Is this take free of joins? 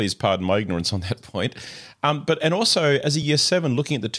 yes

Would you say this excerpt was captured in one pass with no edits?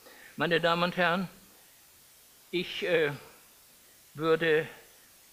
yes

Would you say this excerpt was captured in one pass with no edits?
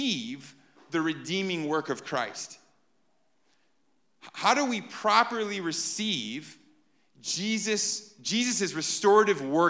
yes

